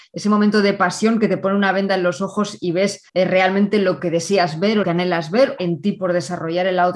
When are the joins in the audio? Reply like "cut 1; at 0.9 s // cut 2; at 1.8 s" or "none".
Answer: cut 1; at 3.1 s // cut 2; at 4.0 s // cut 3; at 4.8 s // cut 4; at 5.6 s

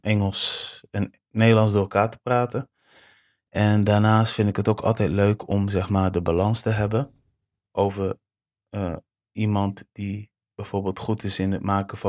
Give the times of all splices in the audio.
cut 1; at 7.7 s

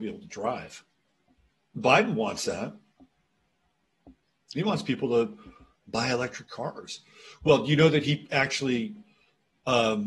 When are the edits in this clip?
none

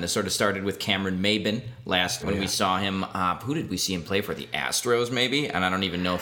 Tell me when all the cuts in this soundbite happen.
cut 1; at 2.2 s

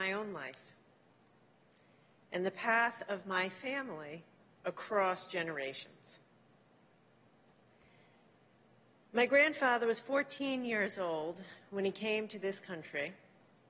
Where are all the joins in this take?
none

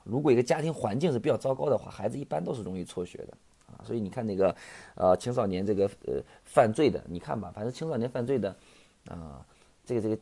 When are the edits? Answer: none

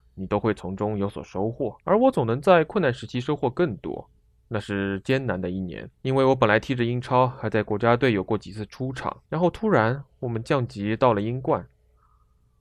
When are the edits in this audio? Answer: cut 1; at 1.8 s // cut 2; at 4.2 s // cut 3; at 5.9 s // cut 4; at 9.3 s

